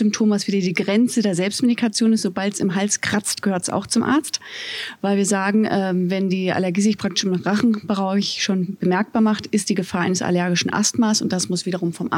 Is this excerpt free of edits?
yes; 0 cuts

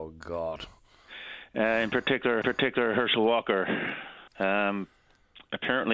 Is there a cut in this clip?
yes; 2 cuts; at 2.4 s, 4.3 s

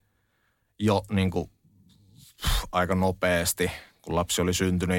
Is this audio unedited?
yes; 0 cuts

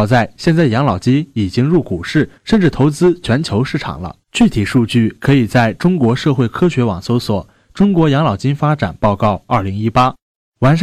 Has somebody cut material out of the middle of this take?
yes; 2 cuts; at 2.4 s, 4.2 s

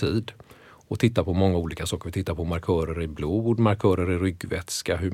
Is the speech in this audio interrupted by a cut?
no; 0 cuts

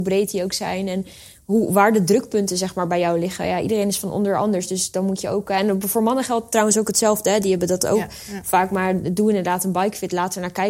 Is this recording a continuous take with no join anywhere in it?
yes; 0 cuts

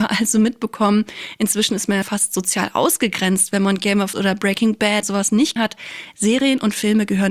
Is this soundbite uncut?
no; 4 cuts; at 2.0 s, 4.1 s, 5.0 s, 5.6 s

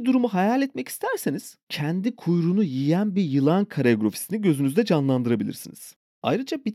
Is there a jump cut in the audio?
no; 0 cuts

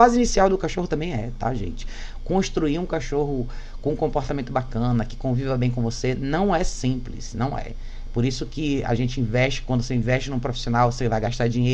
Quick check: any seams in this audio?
no; 0 cuts

